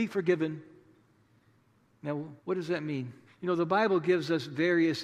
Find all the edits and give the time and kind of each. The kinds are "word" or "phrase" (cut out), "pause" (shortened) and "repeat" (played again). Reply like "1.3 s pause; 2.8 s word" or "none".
2.4 s pause; 3.3 s pause